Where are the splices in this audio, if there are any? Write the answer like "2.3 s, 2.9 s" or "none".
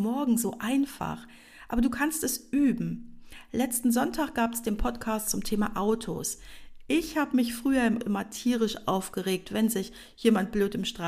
8.0 s